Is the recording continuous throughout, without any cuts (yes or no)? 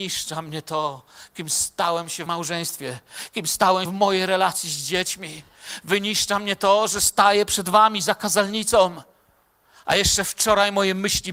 no